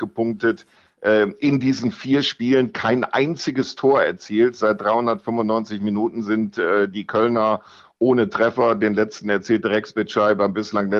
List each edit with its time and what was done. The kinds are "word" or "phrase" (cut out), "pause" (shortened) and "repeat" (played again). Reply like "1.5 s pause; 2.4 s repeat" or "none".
none